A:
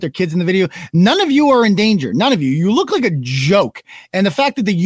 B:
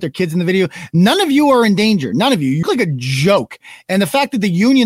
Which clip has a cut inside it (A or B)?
B